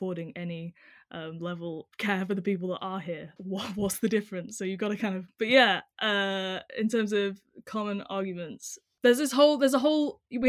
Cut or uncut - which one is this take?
cut